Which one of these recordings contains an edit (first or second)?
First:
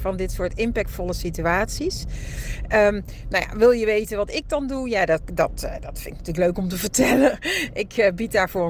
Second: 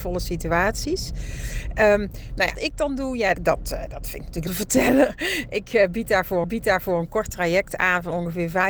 second